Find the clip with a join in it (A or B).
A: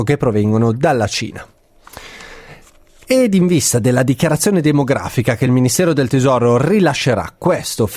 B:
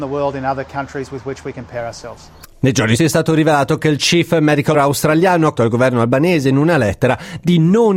B